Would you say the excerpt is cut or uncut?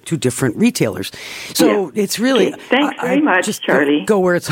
uncut